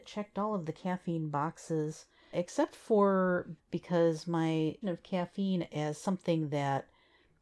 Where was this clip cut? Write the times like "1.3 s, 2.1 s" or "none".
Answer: 2.3 s, 3.6 s, 4.8 s